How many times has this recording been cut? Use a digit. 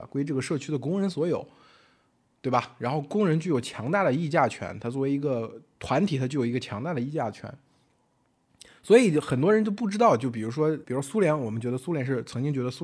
1